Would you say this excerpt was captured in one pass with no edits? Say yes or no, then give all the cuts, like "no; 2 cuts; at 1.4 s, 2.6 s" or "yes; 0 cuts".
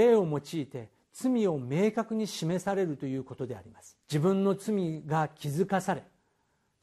no; 1 cut; at 4.0 s